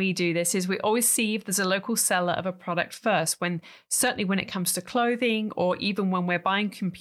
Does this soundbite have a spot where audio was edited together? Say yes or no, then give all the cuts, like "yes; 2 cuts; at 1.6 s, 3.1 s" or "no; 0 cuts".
no; 0 cuts